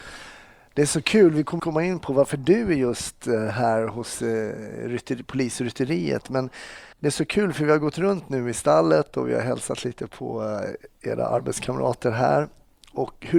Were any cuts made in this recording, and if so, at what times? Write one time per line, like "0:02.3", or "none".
0:01.6
0:06.9
0:10.1